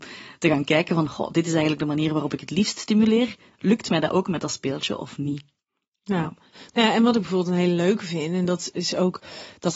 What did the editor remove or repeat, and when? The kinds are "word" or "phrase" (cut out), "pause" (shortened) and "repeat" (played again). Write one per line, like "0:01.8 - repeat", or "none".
none